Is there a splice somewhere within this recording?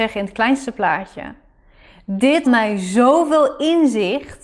yes; 1 cut; at 2.4 s

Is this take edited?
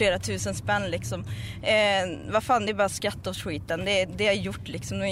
no; 0 cuts

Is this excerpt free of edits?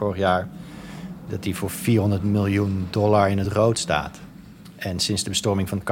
yes; 0 cuts

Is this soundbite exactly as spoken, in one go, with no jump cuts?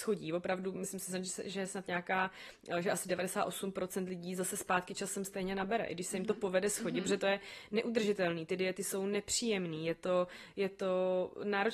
yes; 0 cuts

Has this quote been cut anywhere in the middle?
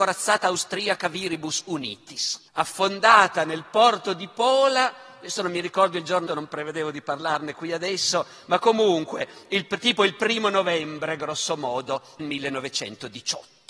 yes; 3 cuts; at 2.5 s, 6.3 s, 12.2 s

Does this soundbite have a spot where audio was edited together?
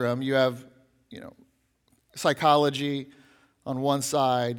no; 0 cuts

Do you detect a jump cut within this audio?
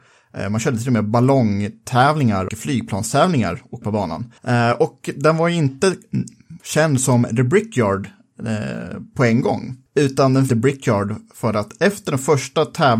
yes; 6 cuts; at 2.5 s, 3.8 s, 4.4 s, 6.6 s, 9.9 s, 10.5 s

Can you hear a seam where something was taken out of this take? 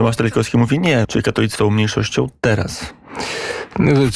yes; 2 cuts; at 1.0 s, 1.6 s

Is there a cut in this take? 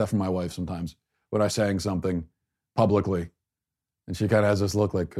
yes; 1 cut; at 1.5 s

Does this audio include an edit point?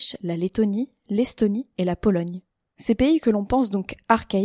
no; 0 cuts

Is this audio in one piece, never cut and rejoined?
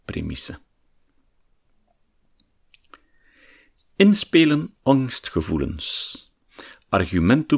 no; 1 cut; at 4.8 s

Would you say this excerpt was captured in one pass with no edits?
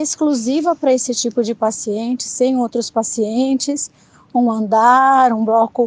yes; 0 cuts

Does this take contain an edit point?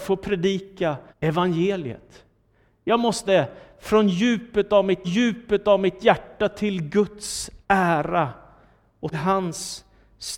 yes; 5 cuts; at 1.1 s, 3.3 s, 5.0 s, 7.6 s, 9.1 s

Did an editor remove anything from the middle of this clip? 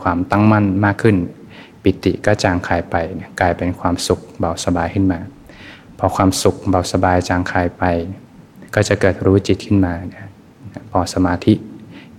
yes; 1 cut; at 8.7 s

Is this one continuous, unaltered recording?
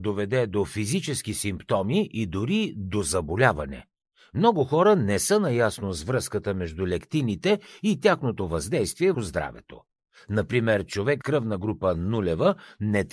no; 2 cuts; at 9.1 s, 11.2 s

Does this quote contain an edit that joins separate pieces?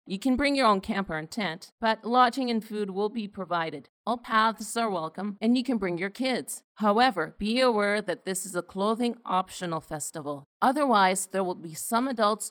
no; 0 cuts

